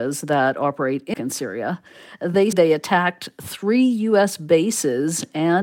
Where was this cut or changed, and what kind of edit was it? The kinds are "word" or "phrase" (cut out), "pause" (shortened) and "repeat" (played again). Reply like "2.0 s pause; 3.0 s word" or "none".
1.1 s word; 2.5 s word